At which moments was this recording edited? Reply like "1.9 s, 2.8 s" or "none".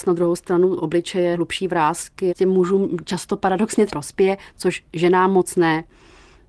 1.3 s, 3.9 s